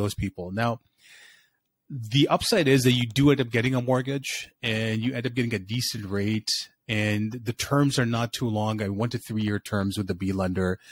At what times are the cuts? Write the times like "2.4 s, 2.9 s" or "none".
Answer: none